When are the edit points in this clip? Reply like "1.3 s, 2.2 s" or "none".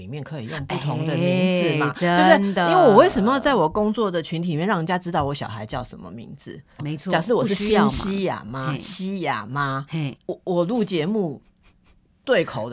6.8 s, 10.2 s